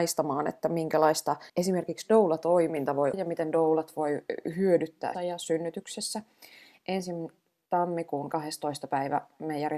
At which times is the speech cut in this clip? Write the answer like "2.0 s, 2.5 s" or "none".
1.5 s, 3.1 s, 5.1 s

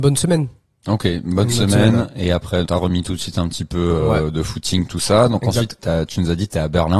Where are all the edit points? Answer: 2.7 s

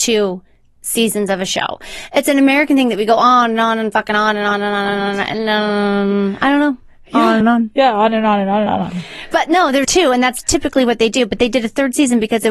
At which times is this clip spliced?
7.4 s, 8.7 s, 9.8 s

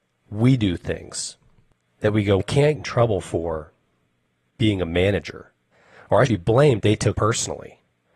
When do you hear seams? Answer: 2.4 s, 2.8 s, 6.3 s, 6.8 s, 7.1 s

